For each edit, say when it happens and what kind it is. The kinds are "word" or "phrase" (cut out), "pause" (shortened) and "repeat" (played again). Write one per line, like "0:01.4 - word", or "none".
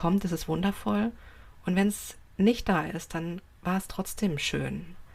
none